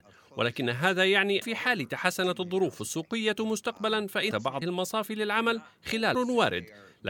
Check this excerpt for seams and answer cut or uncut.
cut